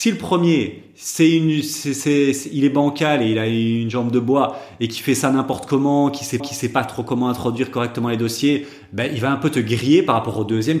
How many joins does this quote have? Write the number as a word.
one